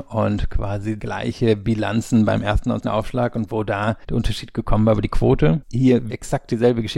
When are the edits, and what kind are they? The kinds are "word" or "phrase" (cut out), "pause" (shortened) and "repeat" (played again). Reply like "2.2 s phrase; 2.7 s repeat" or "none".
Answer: 1.0 s word; 2.8 s word; 4.0 s pause; 5.6 s word; 6.1 s word